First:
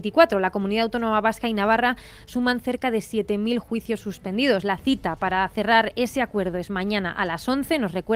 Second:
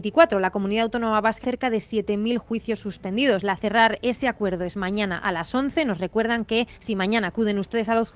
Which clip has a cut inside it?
second; 3 cuts; at 1.4 s, 3.6 s, 6.7 s

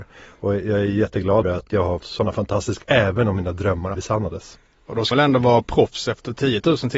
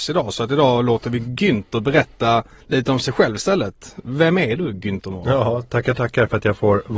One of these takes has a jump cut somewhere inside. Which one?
first; 5 cuts; at 1.4 s, 2.0 s, 2.8 s, 3.9 s, 5.1 s

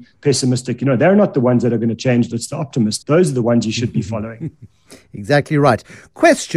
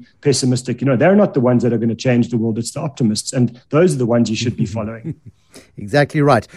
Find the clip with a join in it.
first; 2 cuts; at 2.3 s, 3.0 s

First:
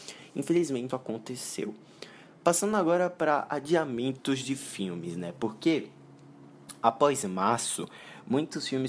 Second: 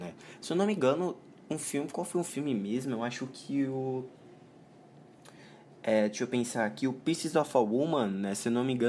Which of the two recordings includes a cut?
first; 1 cut; at 0.9 s

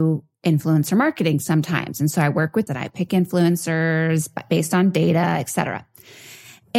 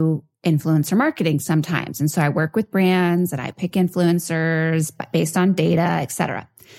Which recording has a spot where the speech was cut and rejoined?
first; 1 cut; at 2.7 s

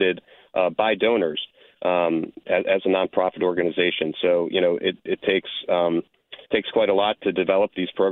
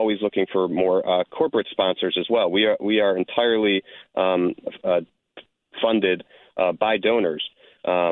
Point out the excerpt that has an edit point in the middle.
first; 1 cut; at 6.4 s

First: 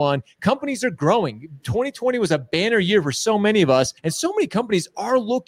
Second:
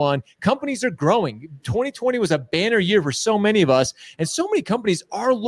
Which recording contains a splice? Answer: first; 1 cut; at 4.0 s

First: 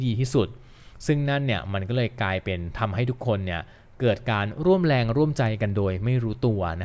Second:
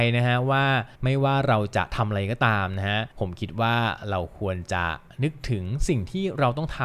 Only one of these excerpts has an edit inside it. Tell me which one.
second; 2 cuts; at 0.9 s, 3.1 s

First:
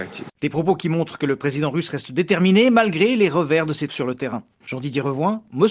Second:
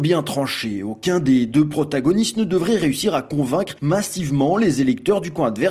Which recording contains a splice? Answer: first; 1 cut; at 3.9 s

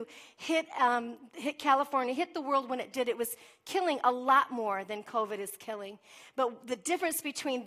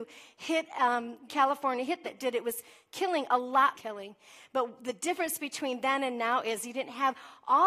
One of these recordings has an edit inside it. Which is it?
second; 3 cuts; at 1.3 s, 2.0 s, 3.7 s

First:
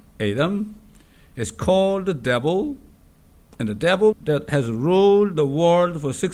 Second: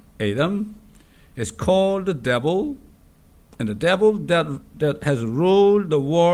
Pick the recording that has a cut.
first; 1 cut; at 4.1 s

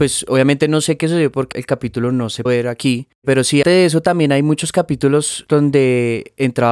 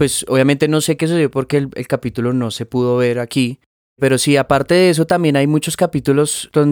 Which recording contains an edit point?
first; 4 cuts; at 1.5 s, 2.5 s, 3.1 s, 3.6 s

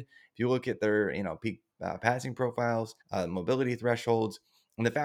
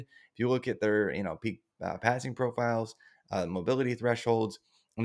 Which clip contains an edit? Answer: first; 1 cut; at 3.0 s

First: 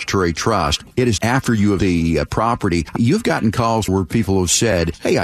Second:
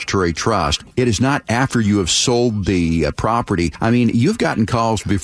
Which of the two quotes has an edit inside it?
first; 4 cuts; at 1.2 s, 1.8 s, 3.0 s, 3.9 s

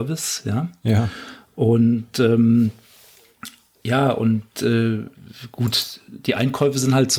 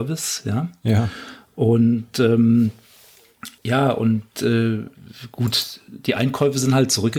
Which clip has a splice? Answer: second; 1 cut; at 3.6 s

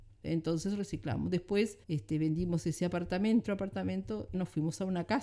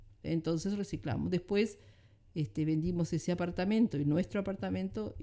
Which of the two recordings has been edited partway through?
first; 3 cuts; at 1.8 s, 3.4 s, 4.3 s

